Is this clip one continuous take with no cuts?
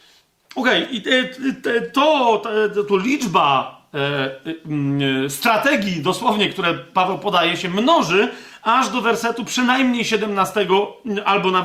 yes; 0 cuts

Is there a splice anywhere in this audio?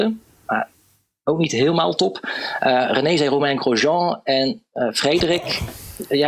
no; 0 cuts

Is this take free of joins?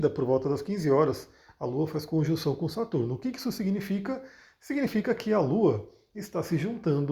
yes; 0 cuts

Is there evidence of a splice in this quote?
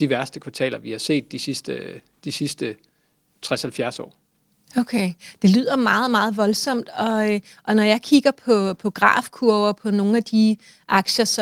no; 0 cuts

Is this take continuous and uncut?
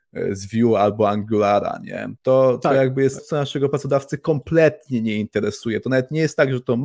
no; 2 cuts; at 2.2 s, 3.2 s

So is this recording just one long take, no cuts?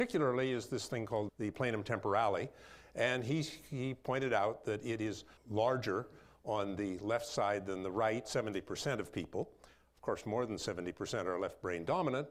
no; 3 cuts; at 1.3 s, 5.4 s, 8.2 s

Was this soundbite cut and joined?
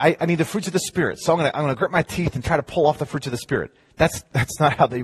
no; 0 cuts

